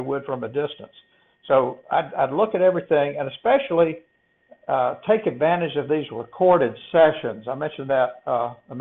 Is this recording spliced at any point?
no; 0 cuts

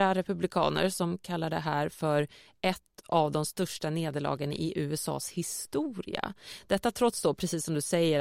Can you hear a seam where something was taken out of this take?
no; 0 cuts

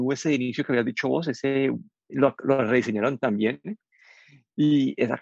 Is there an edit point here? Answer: no; 0 cuts

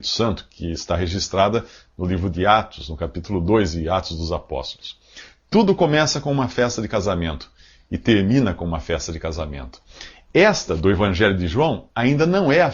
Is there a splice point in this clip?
no; 0 cuts

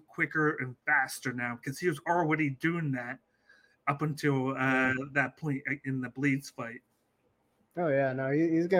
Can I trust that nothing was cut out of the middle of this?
yes; 0 cuts

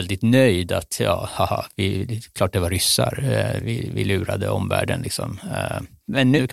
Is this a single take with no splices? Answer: yes; 0 cuts

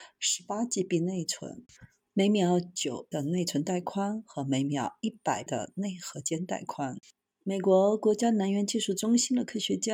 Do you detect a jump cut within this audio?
yes; 2 cuts; at 3.1 s, 5.5 s

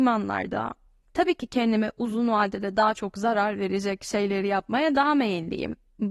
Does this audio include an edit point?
no; 0 cuts

